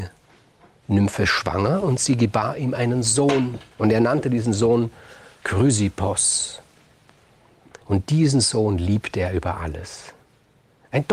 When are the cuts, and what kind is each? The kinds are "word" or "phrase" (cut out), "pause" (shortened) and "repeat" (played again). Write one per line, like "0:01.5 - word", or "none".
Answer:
0:03.7 - pause
0:07.8 - pause